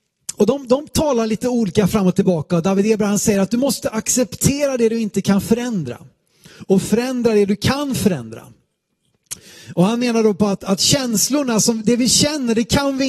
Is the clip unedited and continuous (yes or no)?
yes